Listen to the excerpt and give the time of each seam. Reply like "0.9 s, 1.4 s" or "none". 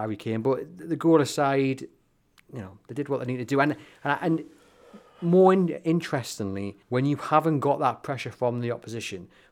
6.8 s